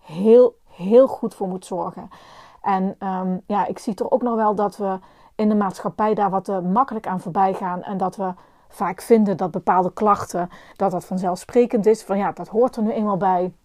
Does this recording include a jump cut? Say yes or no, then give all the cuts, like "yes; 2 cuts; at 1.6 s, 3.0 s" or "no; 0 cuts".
no; 0 cuts